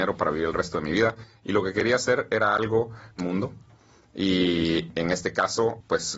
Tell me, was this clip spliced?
yes; 1 cut; at 3.2 s

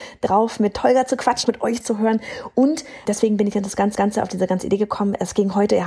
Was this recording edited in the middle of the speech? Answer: yes; 4 cuts; at 1.4 s, 1.8 s, 3.0 s, 3.9 s

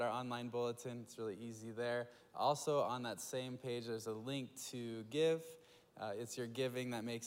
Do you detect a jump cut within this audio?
no; 0 cuts

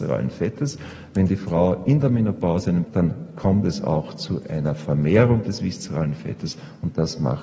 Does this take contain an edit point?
yes; 1 cut; at 2.8 s

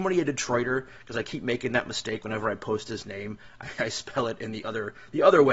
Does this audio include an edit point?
no; 0 cuts

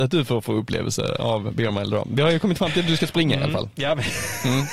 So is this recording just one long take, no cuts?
yes; 0 cuts

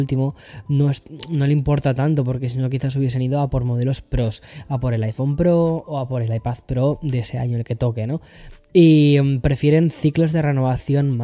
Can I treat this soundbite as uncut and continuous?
yes; 0 cuts

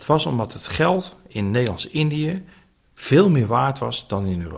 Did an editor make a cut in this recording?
no; 0 cuts

